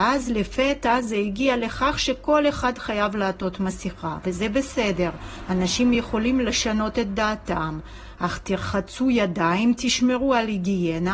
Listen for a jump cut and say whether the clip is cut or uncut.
uncut